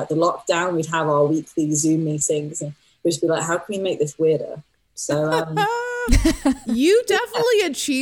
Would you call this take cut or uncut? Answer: uncut